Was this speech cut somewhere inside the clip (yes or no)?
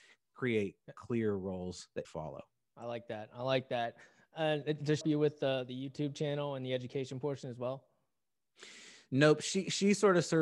yes